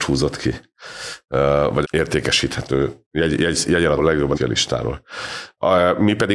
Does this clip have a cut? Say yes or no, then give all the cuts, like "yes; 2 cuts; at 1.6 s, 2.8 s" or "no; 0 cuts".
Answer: yes; 3 cuts; at 1.8 s, 4.0 s, 4.3 s